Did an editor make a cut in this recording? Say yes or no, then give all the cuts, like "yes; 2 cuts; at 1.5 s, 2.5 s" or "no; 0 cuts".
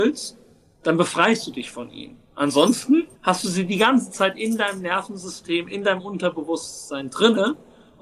yes; 1 cut; at 3.2 s